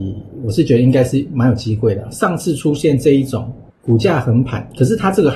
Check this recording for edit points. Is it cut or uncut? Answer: cut